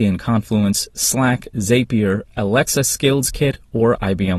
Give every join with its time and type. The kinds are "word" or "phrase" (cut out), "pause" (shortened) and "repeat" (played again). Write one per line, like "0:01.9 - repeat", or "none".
none

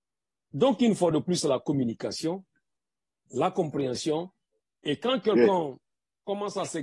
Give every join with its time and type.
none

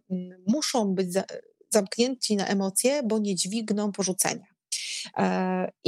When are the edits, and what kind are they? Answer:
none

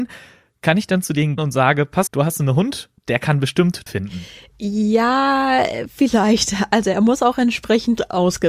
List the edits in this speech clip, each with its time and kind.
0:01.4 - word
0:02.1 - word
0:03.9 - word

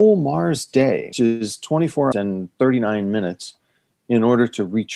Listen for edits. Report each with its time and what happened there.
0:01.1 - word
0:02.1 - word
0:03.9 - word

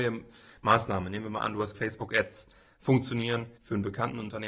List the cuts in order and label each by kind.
0:01.7 - word
0:03.6 - pause

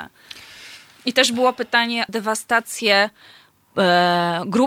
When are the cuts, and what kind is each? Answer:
0:02.1 - word

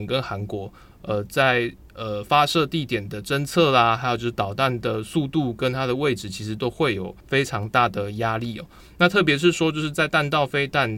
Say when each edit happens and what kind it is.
0:07.2 - pause

